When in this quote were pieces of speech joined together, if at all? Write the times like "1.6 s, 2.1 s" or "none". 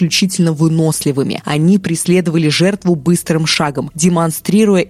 none

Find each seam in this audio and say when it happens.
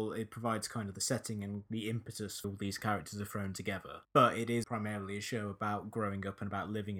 2.4 s, 4.0 s, 4.6 s

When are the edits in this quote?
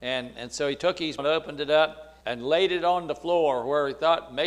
1.2 s, 2.2 s

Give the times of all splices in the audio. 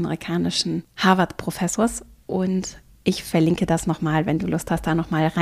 none

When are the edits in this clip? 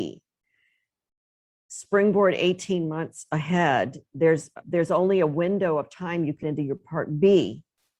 4.6 s, 6.4 s

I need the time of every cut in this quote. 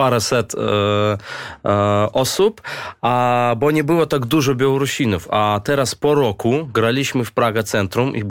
none

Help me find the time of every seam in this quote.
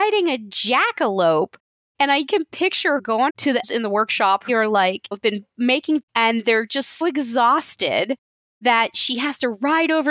2.3 s, 3.0 s, 3.3 s, 3.6 s, 4.5 s, 5.1 s, 6.0 s, 7.0 s

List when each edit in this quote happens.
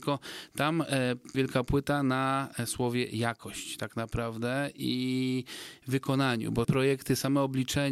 1.3 s, 6.6 s

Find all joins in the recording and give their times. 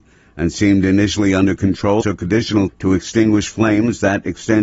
2.0 s, 2.7 s

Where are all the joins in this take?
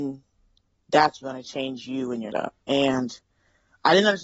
1.2 s, 2.3 s

